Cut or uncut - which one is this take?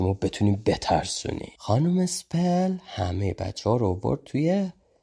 cut